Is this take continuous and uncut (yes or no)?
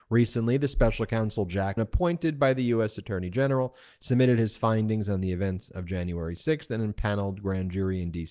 no